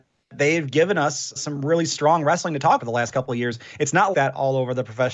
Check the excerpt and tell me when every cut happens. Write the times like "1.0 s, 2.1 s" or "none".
1.4 s, 2.8 s, 4.1 s